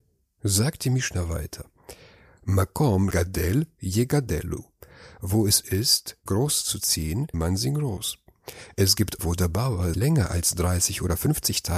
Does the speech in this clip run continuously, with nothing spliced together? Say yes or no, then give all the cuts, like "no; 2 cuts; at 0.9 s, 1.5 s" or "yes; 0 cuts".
no; 6 cuts; at 3.1 s, 5.6 s, 6.3 s, 7.3 s, 9.2 s, 9.9 s